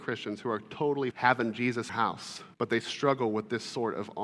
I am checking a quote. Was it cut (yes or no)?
yes